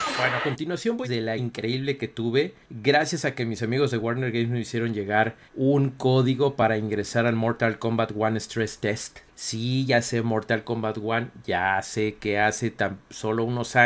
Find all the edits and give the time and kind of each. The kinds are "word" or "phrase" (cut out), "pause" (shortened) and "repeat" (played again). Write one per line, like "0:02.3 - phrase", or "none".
0:01.0 - phrase
0:01.4 - word
0:02.6 - pause
0:05.5 - pause
0:09.3 - pause